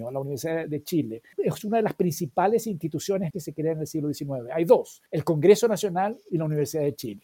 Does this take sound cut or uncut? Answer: cut